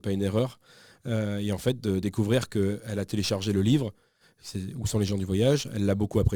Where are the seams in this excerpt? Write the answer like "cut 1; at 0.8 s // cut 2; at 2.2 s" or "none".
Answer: none